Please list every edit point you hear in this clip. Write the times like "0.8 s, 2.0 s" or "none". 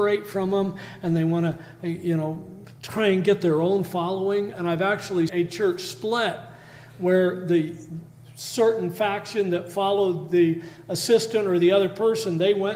2.8 s, 5.3 s